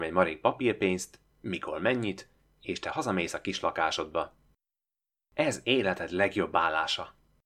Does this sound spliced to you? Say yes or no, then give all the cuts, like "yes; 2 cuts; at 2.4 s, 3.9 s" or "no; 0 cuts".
no; 0 cuts